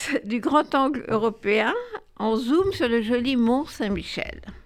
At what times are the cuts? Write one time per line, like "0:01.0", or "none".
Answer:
none